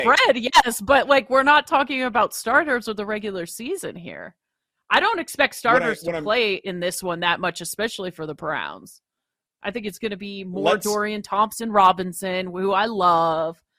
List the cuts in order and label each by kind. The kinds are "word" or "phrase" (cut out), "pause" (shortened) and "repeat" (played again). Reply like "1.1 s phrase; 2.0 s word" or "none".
none